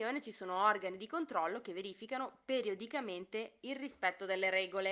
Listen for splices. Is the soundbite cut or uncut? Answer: uncut